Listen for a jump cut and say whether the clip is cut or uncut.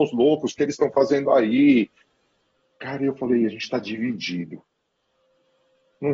uncut